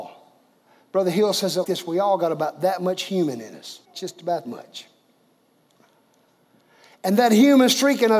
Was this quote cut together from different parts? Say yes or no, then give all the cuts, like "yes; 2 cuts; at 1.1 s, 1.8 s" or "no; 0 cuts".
yes; 3 cuts; at 1.6 s, 3.8 s, 4.5 s